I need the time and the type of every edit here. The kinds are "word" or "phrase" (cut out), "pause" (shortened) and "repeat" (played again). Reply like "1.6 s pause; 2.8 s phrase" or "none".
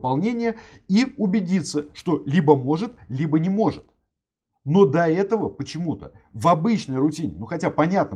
none

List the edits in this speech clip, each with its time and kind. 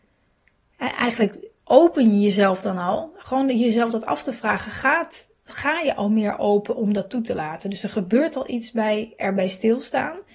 1.6 s pause

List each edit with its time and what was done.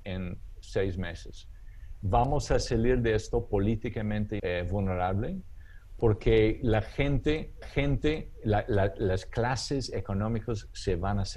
4.4 s word; 7.6 s repeat

